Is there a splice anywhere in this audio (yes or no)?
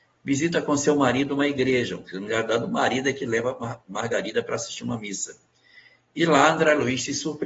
no